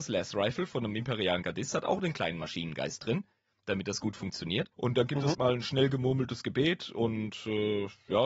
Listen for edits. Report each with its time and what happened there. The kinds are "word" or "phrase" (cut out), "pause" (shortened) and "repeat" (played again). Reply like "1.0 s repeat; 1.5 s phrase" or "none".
4.7 s pause; 5.3 s word